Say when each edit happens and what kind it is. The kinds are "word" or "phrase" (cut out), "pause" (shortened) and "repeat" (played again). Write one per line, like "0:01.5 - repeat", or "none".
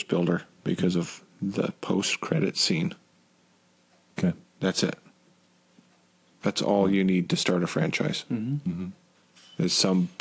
none